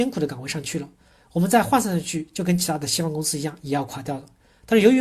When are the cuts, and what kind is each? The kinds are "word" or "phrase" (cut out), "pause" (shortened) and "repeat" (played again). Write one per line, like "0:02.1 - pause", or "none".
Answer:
none